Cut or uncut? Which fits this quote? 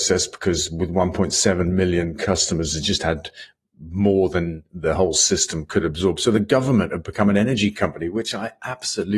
uncut